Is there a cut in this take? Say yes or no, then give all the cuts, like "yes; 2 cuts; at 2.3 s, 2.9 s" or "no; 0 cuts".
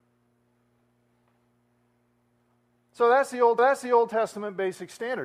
yes; 1 cut; at 3.6 s